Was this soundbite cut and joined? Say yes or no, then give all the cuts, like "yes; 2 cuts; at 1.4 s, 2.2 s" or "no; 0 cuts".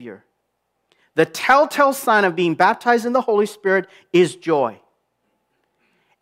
no; 0 cuts